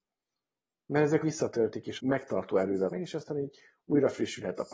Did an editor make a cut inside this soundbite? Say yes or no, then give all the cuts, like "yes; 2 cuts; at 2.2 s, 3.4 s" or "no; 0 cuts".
yes; 3 cuts; at 1.2 s, 2.0 s, 2.9 s